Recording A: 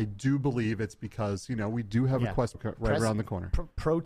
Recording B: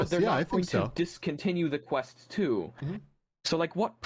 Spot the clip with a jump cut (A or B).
A